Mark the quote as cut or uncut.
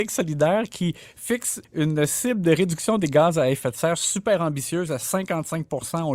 cut